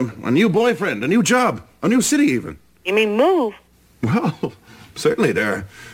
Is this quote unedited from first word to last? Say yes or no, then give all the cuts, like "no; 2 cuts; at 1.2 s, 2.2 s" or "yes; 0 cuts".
yes; 0 cuts